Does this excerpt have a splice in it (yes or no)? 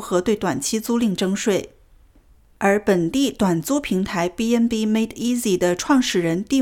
no